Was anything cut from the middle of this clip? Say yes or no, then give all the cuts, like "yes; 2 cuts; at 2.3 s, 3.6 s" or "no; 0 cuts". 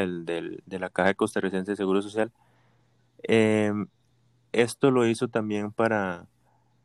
no; 0 cuts